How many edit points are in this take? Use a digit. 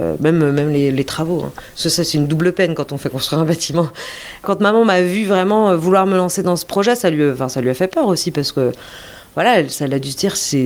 0